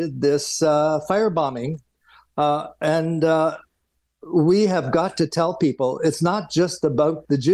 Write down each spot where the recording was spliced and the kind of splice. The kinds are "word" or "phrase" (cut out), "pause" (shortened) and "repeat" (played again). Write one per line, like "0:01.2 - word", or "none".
none